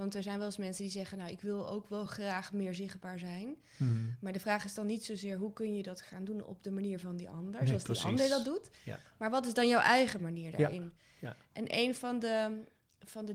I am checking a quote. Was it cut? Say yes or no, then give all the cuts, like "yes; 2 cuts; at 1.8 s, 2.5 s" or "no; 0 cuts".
no; 0 cuts